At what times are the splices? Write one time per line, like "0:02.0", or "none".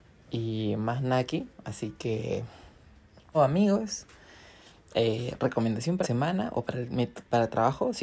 0:03.3
0:06.0